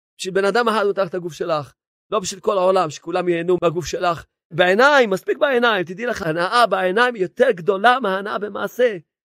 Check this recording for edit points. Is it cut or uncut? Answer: uncut